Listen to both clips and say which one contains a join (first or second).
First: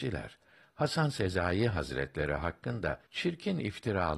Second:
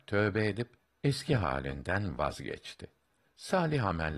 first